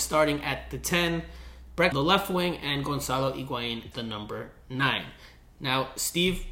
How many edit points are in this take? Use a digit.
2